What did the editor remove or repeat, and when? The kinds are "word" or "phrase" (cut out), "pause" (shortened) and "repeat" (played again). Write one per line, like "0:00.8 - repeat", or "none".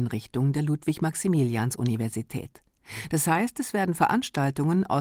none